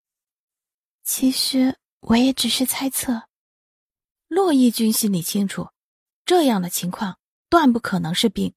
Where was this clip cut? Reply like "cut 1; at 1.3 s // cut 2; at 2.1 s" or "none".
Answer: cut 1; at 3.7 s